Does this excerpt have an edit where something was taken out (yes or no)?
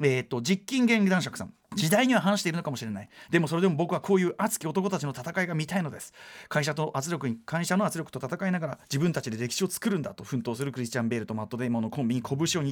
yes